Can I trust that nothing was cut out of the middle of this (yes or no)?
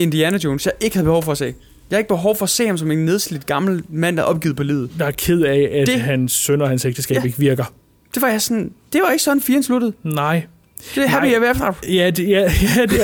yes